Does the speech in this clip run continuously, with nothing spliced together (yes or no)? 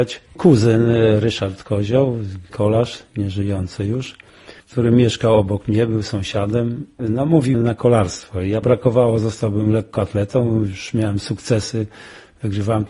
no